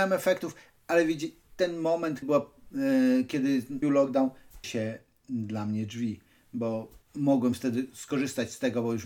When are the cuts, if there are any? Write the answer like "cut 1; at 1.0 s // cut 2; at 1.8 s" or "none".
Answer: cut 1; at 2.2 s // cut 2; at 3.8 s // cut 3; at 4.6 s // cut 4; at 7.0 s